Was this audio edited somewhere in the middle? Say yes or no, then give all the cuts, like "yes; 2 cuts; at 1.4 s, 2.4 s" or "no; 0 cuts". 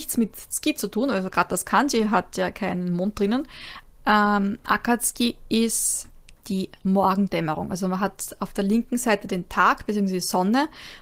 no; 0 cuts